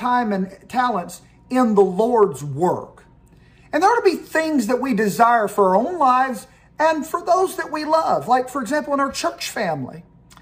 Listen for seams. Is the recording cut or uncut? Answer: uncut